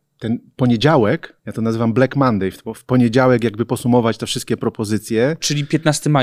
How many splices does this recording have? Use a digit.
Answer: 1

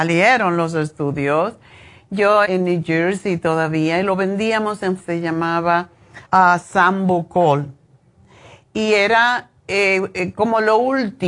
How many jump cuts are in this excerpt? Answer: 3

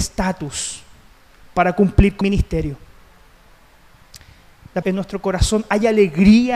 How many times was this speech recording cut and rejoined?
2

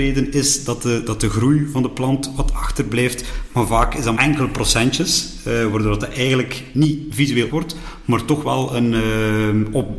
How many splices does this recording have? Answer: 2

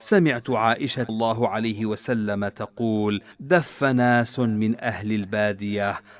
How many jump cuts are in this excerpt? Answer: 2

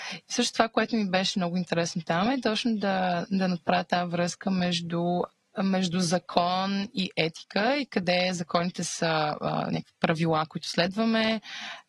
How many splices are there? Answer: 0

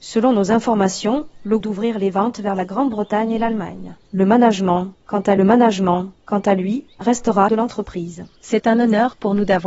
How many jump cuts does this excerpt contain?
5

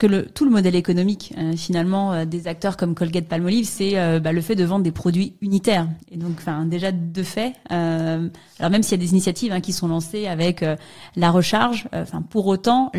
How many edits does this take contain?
0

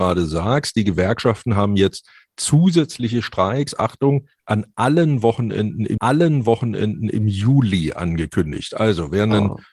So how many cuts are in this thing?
1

